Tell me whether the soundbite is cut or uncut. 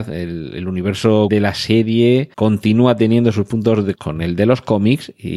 cut